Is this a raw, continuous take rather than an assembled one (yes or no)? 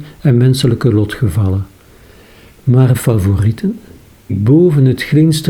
no